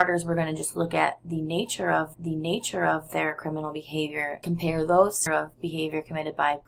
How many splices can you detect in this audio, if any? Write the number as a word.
two